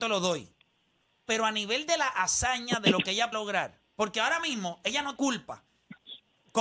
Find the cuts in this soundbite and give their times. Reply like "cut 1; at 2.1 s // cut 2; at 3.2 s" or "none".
cut 1; at 3.3 s // cut 2; at 5.2 s